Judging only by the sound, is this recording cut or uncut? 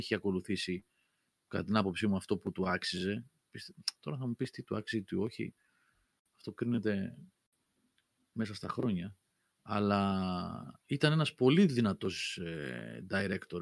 uncut